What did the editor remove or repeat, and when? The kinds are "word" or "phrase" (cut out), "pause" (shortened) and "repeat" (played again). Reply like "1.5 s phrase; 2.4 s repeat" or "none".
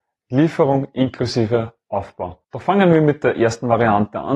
2.4 s pause